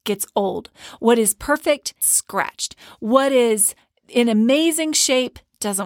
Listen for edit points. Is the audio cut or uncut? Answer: cut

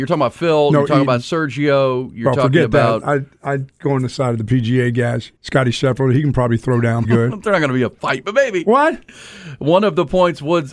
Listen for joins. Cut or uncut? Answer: cut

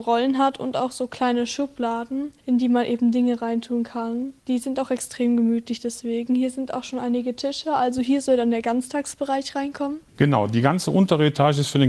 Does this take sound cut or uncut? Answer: cut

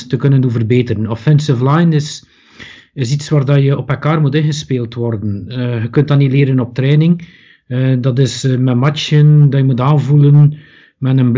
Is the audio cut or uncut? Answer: uncut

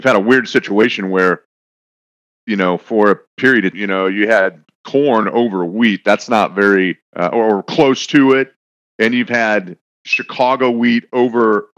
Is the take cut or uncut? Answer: cut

